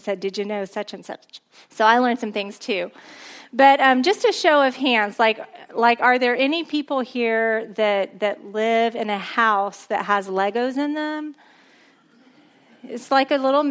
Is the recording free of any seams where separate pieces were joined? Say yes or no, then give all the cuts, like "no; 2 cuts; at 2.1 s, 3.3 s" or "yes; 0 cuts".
yes; 0 cuts